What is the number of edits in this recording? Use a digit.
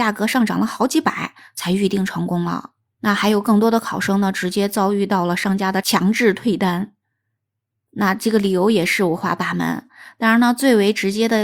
1